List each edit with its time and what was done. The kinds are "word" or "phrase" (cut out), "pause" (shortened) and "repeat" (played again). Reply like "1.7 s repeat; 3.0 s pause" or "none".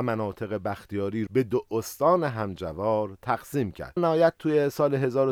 1.3 s word; 4.0 s word